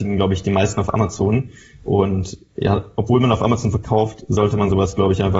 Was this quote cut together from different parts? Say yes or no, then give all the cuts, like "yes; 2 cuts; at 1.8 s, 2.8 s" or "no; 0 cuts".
no; 0 cuts